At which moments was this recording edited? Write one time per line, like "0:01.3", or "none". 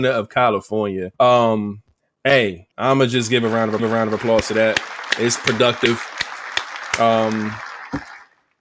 0:01.1
0:02.7
0:03.8